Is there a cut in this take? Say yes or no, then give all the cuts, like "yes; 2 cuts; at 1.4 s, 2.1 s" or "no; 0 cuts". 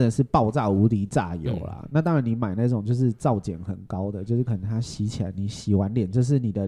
no; 0 cuts